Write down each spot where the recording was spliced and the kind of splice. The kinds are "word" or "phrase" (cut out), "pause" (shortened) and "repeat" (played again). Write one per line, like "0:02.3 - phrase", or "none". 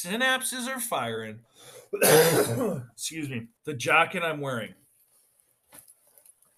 0:03.6 - pause